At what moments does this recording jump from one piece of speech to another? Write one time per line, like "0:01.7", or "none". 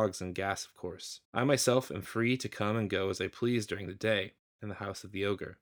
0:01.2

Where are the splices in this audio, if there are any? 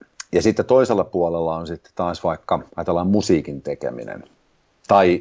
0:02.7

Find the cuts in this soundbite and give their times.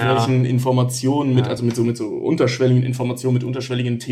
none

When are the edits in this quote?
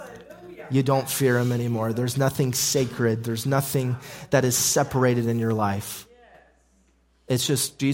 none

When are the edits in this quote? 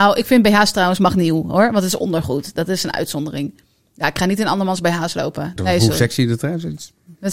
0:05.6

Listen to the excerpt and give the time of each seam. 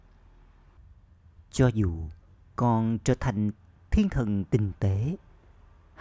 none

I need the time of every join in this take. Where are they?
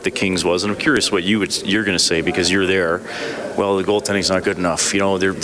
0:04.4

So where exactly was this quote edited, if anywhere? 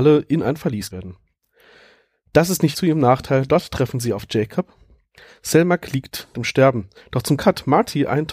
0:00.9
0:02.7
0:03.5
0:06.3
0:07.4

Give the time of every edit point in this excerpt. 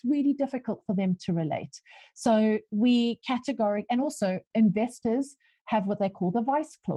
none

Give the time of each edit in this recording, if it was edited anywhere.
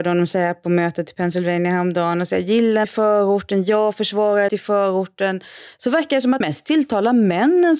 0:02.8
0:04.5
0:06.4

